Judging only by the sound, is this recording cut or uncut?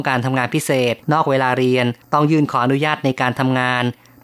cut